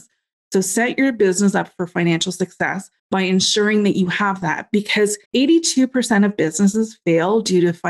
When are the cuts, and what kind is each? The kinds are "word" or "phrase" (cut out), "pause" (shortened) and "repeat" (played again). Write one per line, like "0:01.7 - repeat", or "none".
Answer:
0:03.0 - pause
0:05.3 - pause